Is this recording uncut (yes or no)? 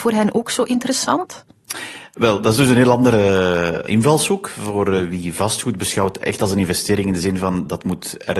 yes